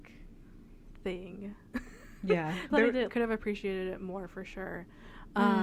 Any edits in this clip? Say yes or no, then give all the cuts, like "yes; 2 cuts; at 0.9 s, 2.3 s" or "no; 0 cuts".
yes; 2 cuts; at 2.7 s, 3.1 s